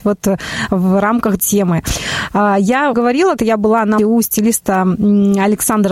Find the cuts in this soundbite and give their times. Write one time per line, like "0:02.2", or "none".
0:01.4
0:02.9
0:03.4
0:04.0